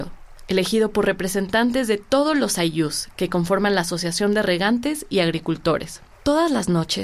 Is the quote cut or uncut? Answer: cut